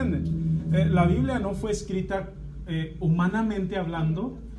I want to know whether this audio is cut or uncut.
uncut